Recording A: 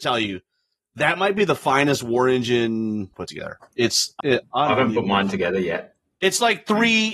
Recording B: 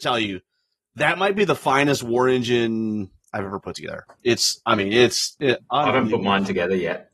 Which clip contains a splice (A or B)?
A